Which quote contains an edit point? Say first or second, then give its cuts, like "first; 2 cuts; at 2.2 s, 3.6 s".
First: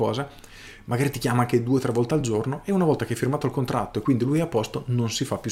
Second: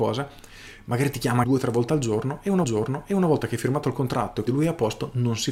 second; 3 cuts; at 1.4 s, 2.6 s, 4.5 s